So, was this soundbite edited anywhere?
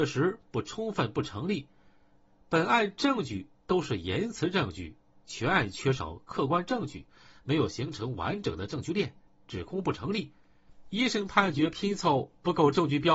no; 0 cuts

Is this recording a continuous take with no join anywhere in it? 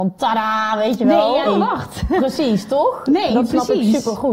no; 1 cut; at 1.4 s

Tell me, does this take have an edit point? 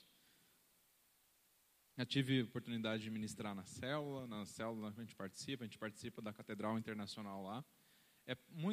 no; 0 cuts

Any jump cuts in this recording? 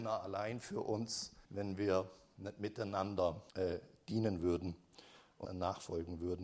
yes; 3 cuts; at 1.4 s, 3.5 s, 5.5 s

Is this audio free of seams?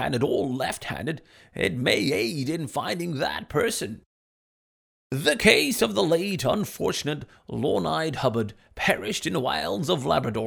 yes; 0 cuts

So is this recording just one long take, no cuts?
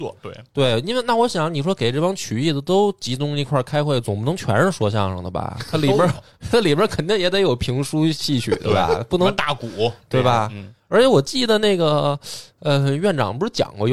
yes; 0 cuts

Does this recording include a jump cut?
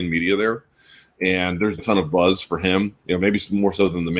yes; 2 cuts; at 1.8 s, 3.0 s

